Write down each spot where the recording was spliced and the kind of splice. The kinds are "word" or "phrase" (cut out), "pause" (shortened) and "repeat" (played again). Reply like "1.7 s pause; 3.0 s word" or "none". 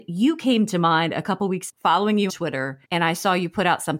1.7 s word; 2.3 s word; 2.8 s pause